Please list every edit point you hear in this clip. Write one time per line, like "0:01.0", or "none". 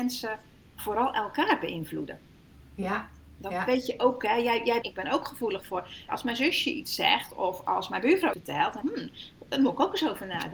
0:04.8
0:06.1
0:08.3
0:08.8